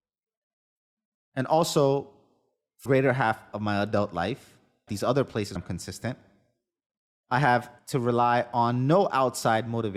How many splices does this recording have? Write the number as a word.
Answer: four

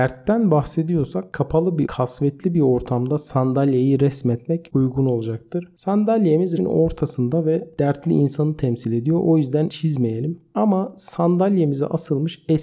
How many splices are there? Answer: three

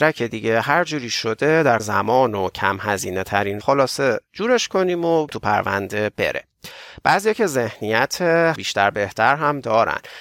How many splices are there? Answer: four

